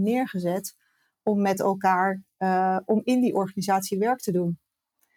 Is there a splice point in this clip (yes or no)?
no